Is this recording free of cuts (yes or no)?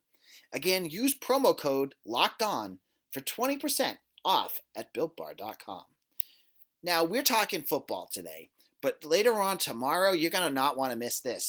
yes